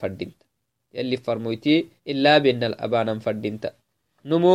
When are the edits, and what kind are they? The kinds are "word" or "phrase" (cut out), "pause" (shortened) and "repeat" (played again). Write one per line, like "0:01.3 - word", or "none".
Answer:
0:02.0 - pause